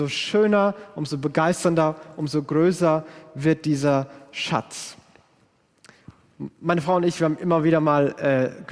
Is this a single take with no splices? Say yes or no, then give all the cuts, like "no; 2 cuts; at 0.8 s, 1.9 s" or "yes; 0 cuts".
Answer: yes; 0 cuts